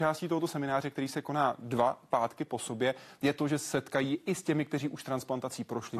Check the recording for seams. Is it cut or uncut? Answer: uncut